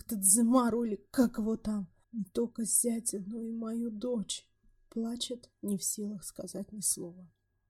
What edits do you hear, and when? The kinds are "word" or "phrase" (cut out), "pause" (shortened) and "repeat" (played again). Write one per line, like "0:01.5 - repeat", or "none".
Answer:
0:02.0 - pause
0:05.5 - pause